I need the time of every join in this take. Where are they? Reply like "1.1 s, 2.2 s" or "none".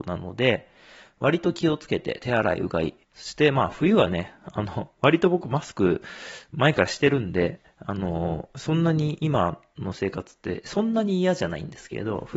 3.0 s

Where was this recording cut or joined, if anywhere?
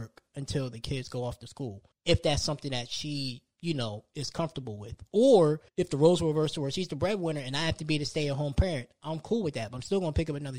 1.9 s, 5.7 s

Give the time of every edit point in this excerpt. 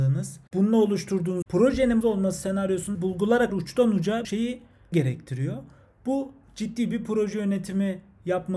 1.4 s, 2.0 s, 2.9 s, 3.5 s, 4.2 s, 4.9 s

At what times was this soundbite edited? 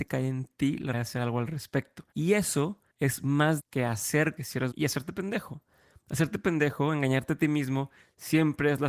0.9 s, 2.1 s, 2.9 s, 3.6 s, 4.4 s, 4.7 s

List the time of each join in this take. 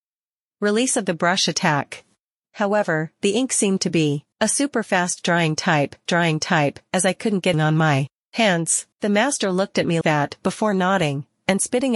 2.3 s, 4.3 s, 6.1 s, 7.5 s, 8.9 s, 10.0 s

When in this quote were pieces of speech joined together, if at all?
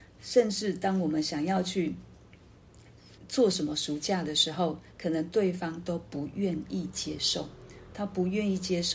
3.2 s

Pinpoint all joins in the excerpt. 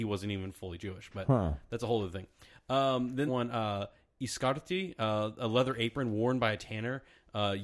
3.3 s

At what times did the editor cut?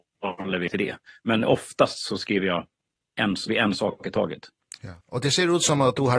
3.5 s, 5.0 s

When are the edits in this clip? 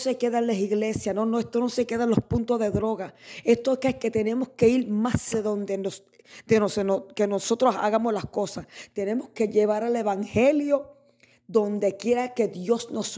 5.3 s

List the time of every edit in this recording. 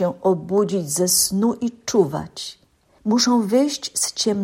none

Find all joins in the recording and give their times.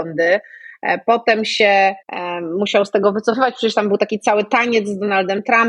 2.0 s

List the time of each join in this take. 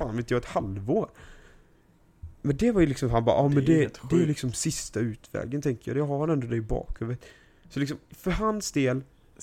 8.0 s

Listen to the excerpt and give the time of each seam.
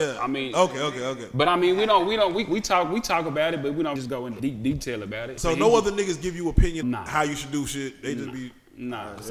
4.0 s, 4.4 s, 5.4 s, 6.8 s

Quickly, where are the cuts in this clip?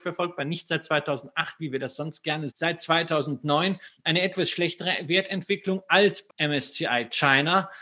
2.5 s, 6.3 s

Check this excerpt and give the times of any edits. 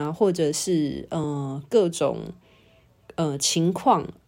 none

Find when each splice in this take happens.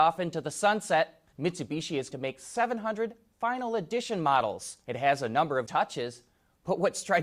1.3 s, 2.1 s, 4.8 s, 5.7 s

